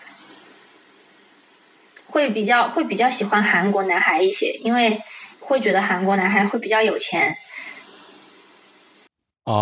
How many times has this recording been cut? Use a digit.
1